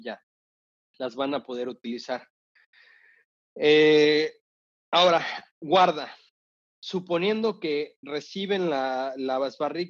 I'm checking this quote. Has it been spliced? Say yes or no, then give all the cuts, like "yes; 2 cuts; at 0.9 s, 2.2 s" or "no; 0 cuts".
no; 0 cuts